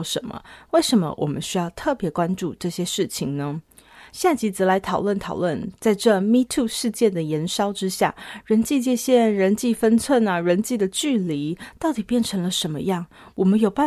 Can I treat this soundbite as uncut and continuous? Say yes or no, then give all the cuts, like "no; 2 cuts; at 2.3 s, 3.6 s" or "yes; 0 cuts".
yes; 0 cuts